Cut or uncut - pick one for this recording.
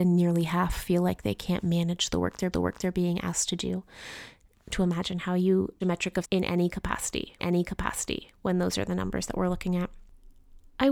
cut